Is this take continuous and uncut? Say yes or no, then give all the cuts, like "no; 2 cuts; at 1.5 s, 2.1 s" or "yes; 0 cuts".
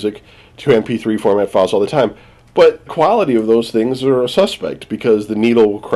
no; 1 cut; at 2.9 s